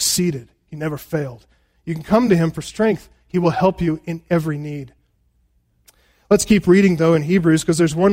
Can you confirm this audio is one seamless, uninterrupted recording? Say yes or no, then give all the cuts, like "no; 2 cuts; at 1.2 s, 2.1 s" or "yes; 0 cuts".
yes; 0 cuts